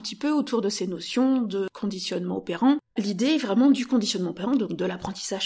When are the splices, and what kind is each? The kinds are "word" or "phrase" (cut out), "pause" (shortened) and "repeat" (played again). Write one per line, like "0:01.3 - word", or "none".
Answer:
0:03.0 - word